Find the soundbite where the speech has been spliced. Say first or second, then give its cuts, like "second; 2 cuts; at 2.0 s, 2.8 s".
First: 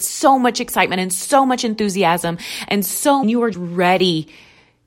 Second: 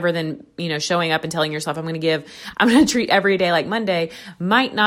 first; 2 cuts; at 3.2 s, 3.5 s